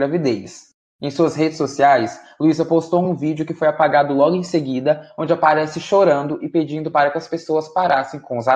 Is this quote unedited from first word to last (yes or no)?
yes